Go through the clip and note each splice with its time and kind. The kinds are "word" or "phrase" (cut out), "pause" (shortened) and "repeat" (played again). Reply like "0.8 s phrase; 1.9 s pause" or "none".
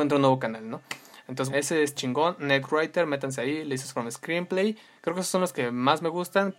1.5 s word; 2.0 s word